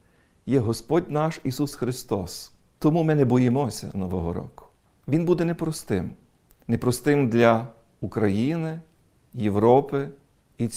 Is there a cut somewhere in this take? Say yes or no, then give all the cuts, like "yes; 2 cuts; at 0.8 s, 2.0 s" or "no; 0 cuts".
no; 0 cuts